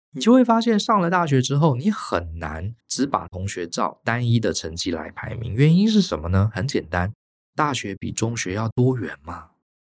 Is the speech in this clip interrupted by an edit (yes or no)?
yes